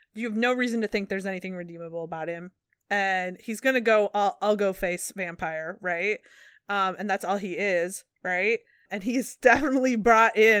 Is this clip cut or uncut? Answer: cut